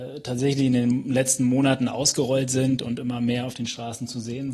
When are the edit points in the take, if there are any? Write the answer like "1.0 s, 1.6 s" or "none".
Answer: none